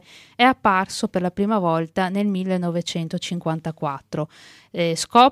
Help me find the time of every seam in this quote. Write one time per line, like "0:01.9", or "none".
none